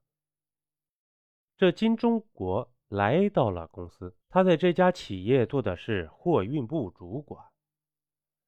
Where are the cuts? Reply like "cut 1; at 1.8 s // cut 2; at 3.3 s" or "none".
cut 1; at 4.2 s